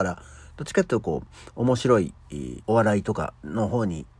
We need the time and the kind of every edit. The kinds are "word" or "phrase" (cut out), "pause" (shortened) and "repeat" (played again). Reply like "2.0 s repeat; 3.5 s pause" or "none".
2.6 s pause